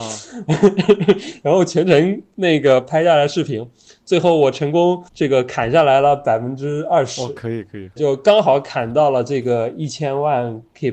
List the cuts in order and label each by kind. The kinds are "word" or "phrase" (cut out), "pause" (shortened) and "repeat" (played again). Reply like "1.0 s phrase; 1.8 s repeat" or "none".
5.1 s pause; 8.0 s word